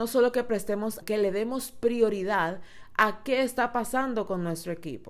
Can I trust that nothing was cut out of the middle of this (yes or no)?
no